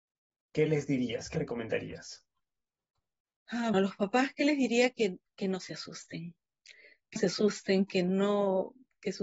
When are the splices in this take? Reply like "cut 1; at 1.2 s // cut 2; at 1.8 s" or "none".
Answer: cut 1; at 1.3 s // cut 2; at 3.7 s // cut 3; at 7.2 s